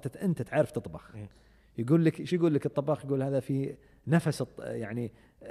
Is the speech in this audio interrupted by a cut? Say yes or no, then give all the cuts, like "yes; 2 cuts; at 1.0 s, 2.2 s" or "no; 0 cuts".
no; 0 cuts